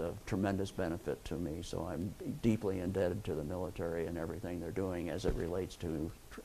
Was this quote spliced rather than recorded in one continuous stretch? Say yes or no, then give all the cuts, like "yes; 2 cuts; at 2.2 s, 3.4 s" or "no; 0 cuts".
no; 0 cuts